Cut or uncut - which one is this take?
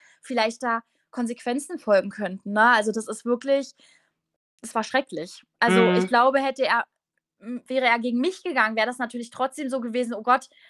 uncut